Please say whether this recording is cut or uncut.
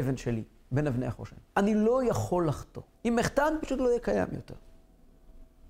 cut